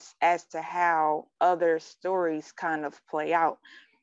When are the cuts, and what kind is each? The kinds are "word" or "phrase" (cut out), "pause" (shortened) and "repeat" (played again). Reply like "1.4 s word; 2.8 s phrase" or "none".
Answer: 1.3 s pause

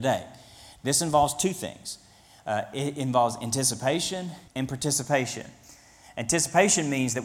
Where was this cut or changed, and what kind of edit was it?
4.5 s pause

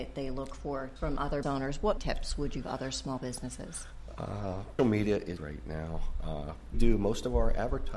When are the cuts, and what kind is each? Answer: 1.0 s word; 1.4 s word; 2.0 s word; 2.6 s word; 4.8 s word; 5.4 s word; 6.7 s word

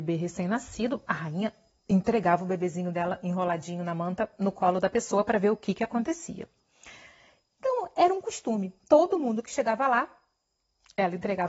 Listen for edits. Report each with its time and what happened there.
none

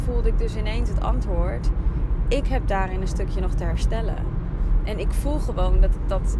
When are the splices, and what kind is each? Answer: none

